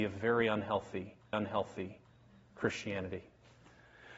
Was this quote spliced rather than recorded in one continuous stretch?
yes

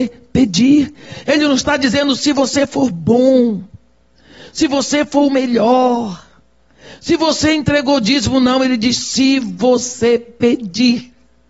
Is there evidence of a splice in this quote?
no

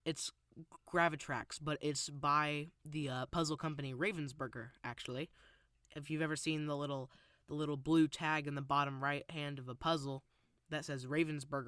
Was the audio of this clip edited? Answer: no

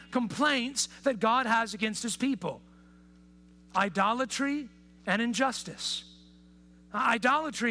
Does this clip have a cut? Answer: no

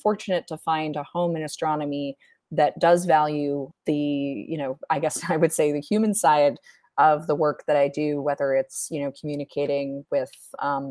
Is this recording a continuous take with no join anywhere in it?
yes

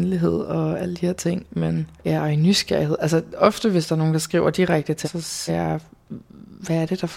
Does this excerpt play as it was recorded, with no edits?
no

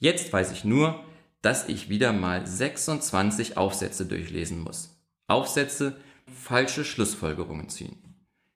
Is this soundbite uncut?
no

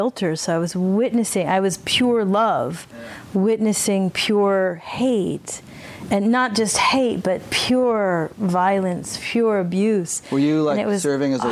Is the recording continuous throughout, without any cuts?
yes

